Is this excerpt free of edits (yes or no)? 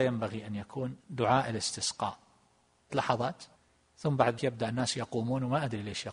no